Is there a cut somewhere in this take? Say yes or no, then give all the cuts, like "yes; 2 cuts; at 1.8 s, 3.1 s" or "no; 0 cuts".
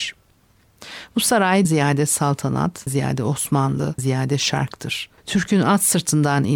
yes; 4 cuts; at 1.6 s, 2.9 s, 4.0 s, 5.2 s